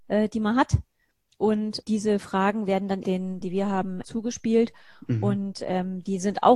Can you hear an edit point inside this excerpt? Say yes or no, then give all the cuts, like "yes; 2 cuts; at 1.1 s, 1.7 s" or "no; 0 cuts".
yes; 4 cuts; at 1.8 s, 3.0 s, 3.4 s, 4.0 s